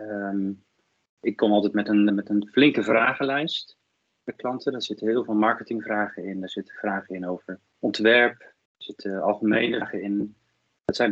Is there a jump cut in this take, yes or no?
yes